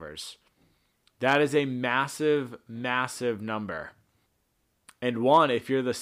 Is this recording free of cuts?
yes; 0 cuts

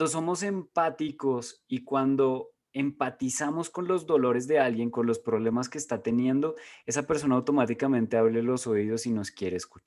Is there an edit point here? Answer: no; 0 cuts

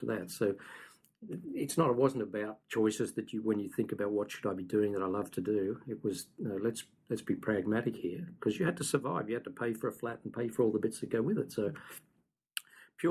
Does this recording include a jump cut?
yes; 1 cut; at 2.6 s

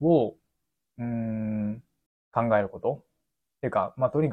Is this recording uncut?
no; 1 cut; at 2.1 s

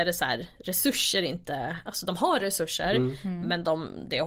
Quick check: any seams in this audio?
no; 0 cuts

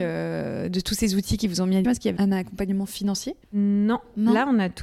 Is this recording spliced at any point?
yes; 3 cuts; at 1.8 s, 2.2 s, 3.4 s

